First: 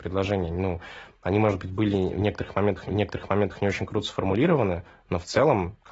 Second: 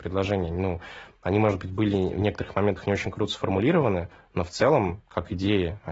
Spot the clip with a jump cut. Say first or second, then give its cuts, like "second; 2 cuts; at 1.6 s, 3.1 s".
first; 1 cut; at 2.9 s